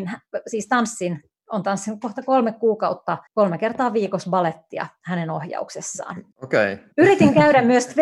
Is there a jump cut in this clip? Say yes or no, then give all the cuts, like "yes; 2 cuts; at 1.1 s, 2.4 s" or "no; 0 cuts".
yes; 3 cuts; at 3.3 s, 6.3 s, 6.9 s